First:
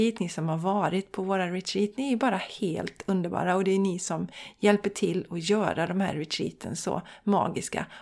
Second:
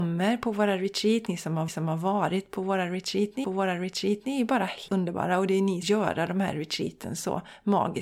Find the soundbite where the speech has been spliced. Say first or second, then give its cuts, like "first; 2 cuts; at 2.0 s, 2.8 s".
second; 4 cuts; at 1.7 s, 3.4 s, 4.9 s, 5.8 s